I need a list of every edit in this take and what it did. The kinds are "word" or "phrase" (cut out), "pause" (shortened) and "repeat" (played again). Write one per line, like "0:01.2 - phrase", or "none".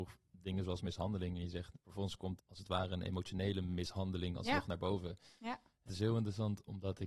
0:01.8 - word
0:02.4 - word
0:05.9 - word